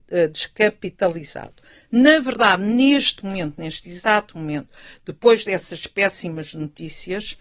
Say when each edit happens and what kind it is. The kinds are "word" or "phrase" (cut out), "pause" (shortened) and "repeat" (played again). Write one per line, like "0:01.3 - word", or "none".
none